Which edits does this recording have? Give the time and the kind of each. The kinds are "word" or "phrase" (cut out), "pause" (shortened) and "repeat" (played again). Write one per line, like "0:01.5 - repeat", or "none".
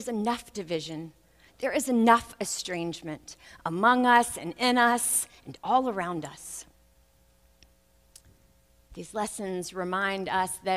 none